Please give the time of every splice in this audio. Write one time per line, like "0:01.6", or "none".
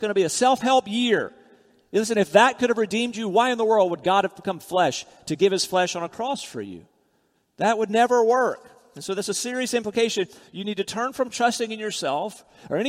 none